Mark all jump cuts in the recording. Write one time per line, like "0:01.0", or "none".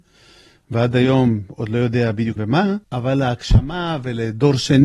0:02.4
0:02.8